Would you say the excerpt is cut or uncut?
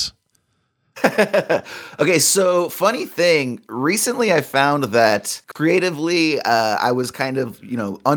cut